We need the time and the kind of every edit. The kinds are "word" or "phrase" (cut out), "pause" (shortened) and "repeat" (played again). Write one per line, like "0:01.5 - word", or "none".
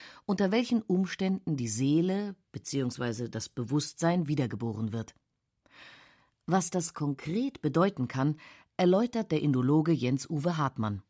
none